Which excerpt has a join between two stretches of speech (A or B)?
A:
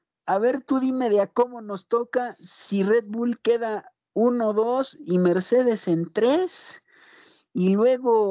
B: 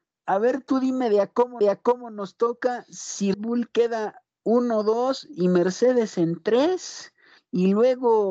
B